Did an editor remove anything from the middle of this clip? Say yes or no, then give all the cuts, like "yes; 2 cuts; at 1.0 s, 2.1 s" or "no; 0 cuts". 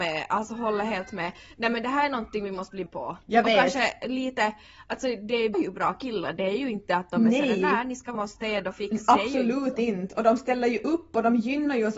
yes; 3 cuts; at 2.9 s, 5.5 s, 8.2 s